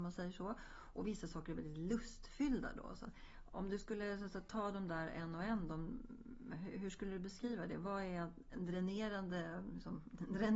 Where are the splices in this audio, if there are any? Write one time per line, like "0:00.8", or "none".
none